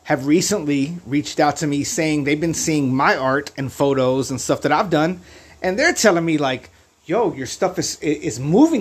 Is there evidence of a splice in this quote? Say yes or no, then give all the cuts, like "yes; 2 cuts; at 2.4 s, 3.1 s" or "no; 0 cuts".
no; 0 cuts